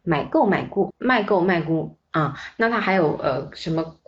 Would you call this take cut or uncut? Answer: cut